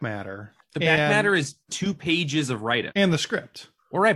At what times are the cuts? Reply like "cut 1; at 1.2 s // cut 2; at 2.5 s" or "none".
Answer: cut 1; at 1.7 s // cut 2; at 2.9 s